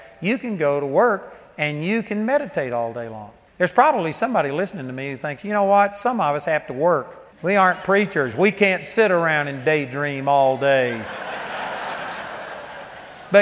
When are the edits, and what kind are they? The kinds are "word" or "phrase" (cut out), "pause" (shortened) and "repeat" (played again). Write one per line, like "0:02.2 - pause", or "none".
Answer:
0:03.5 - pause
0:07.3 - pause